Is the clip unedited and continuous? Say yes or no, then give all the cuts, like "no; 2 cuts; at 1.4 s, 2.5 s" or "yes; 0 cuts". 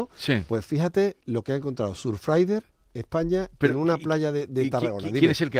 yes; 0 cuts